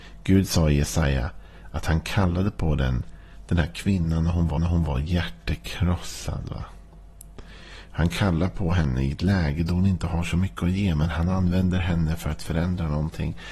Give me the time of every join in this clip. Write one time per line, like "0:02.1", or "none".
0:04.6